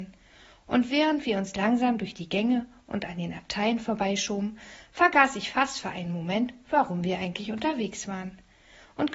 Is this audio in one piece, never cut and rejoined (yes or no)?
yes